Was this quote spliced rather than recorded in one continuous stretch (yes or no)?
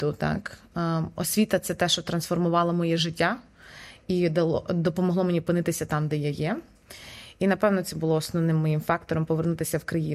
no